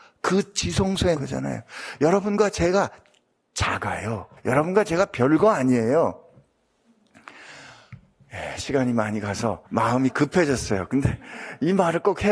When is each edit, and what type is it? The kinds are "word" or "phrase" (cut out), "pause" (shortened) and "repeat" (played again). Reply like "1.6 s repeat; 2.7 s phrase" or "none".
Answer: 1.2 s word; 4.4 s pause; 9.7 s pause